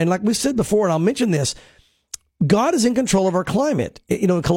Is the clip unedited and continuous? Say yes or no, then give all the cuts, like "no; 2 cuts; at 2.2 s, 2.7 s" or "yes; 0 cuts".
yes; 0 cuts